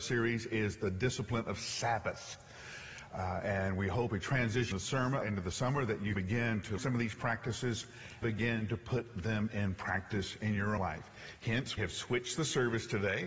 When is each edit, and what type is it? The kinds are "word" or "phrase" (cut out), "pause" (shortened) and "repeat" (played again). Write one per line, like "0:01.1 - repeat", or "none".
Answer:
0:04.1 - word
0:04.7 - word
0:05.2 - word
0:06.2 - word
0:06.8 - word
0:08.2 - word
0:10.8 - word
0:11.8 - word

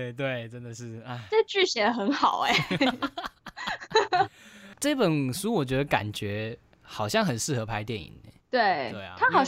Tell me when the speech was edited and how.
0:08.4 - pause

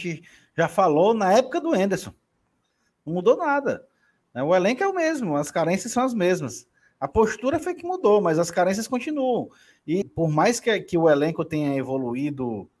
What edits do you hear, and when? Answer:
0:10.0 - word

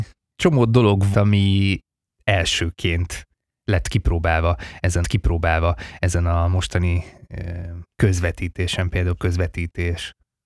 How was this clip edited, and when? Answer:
0:01.1 - word
0:05.0 - repeat
0:07.9 - pause
0:09.2 - word

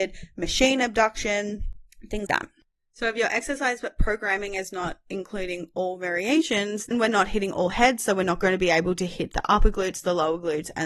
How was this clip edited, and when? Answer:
0:02.3 - word
0:06.9 - word

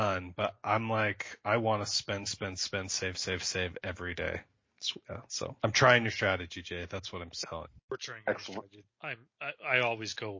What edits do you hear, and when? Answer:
0:05.1 - pause
0:05.6 - pause

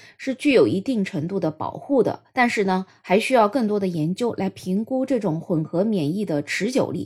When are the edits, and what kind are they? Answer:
0:02.3 - pause

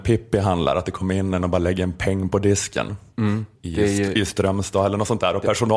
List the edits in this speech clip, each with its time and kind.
0:01.4 - word
0:03.5 - pause

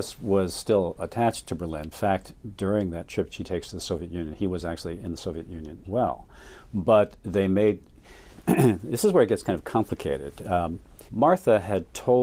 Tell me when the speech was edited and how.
0:01.9 - phrase
0:03.3 - word
0:05.0 - word
0:05.8 - word
0:07.9 - pause
0:11.1 - pause

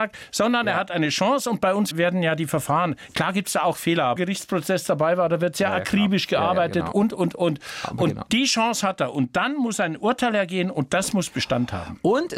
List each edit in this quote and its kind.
0:01.9 - word
0:04.2 - phrase

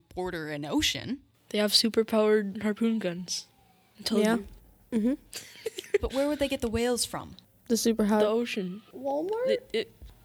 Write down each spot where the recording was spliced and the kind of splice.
0:06.0 - word

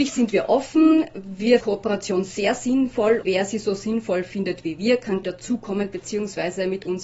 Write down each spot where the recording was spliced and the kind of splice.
0:01.6 - word
0:03.2 - word
0:05.2 - word

